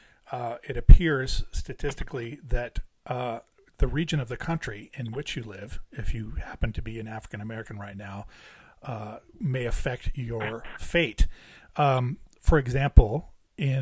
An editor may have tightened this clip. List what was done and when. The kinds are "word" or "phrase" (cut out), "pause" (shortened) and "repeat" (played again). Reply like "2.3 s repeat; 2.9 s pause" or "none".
none